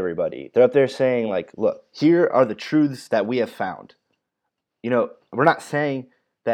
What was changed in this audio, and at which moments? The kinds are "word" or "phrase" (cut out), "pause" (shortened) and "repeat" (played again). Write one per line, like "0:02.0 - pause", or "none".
none